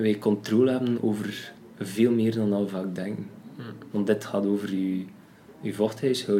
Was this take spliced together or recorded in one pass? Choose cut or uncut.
uncut